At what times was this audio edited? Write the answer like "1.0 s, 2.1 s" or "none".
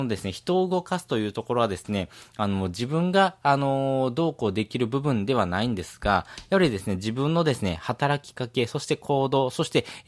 none